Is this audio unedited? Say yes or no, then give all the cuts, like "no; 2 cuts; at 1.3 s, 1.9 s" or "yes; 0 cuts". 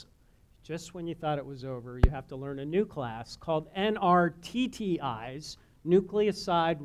yes; 0 cuts